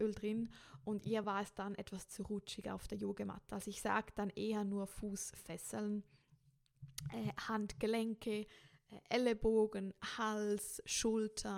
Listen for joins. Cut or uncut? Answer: uncut